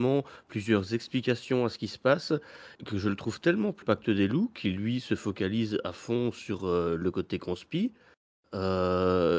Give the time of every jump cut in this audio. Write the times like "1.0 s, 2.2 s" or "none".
2.7 s, 3.8 s